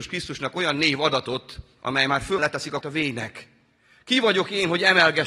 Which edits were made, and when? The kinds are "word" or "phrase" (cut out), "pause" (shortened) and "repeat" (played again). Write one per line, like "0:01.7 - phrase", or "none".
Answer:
0:02.4 - phrase
0:02.8 - word